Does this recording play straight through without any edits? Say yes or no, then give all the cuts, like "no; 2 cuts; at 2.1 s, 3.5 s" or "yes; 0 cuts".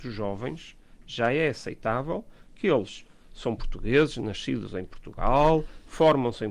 yes; 0 cuts